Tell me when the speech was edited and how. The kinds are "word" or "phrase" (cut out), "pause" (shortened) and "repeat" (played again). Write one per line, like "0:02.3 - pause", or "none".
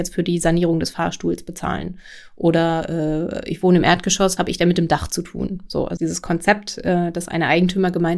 0:04.4 - phrase
0:06.0 - word